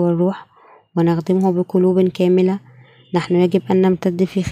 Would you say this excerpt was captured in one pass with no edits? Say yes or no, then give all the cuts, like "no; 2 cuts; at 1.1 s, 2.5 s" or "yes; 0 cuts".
yes; 0 cuts